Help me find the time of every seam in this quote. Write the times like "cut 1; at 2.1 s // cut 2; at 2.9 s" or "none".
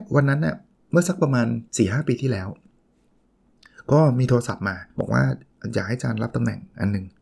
cut 1; at 1.7 s // cut 2; at 4.9 s